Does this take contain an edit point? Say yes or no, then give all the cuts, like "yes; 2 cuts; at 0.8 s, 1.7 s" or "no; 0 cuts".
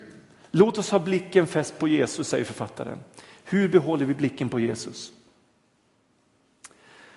no; 0 cuts